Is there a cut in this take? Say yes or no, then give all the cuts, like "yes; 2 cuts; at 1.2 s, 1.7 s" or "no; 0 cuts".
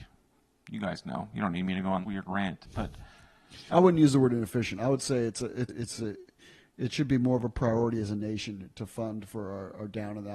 yes; 3 cuts; at 2.0 s, 3.7 s, 5.7 s